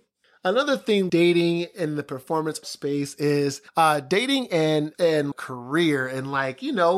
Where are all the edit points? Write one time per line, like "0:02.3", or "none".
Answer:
0:01.1
0:02.6
0:03.7
0:04.9
0:05.3